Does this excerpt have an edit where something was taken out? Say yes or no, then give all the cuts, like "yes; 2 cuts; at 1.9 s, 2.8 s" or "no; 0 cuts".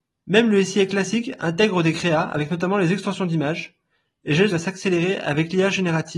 yes; 1 cut; at 4.5 s